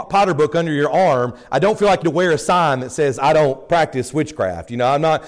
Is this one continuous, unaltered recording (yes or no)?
no